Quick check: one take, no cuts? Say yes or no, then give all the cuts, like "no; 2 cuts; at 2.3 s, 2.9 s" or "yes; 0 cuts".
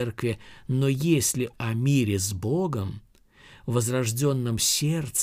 no; 1 cut; at 1.5 s